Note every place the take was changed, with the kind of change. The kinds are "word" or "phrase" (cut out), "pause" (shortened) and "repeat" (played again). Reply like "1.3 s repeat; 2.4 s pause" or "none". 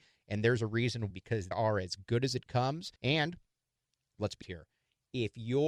1.1 s word; 1.5 s word; 3.0 s pause; 4.4 s word